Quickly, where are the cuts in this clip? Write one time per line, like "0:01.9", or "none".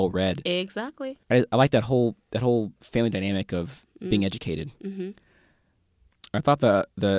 0:01.2